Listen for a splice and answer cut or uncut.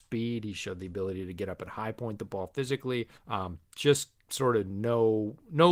cut